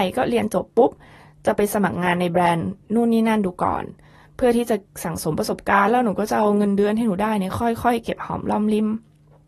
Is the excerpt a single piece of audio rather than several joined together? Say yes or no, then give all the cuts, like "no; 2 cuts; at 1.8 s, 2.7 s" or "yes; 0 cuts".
yes; 0 cuts